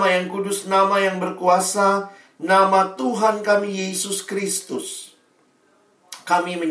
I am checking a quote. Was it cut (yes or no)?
no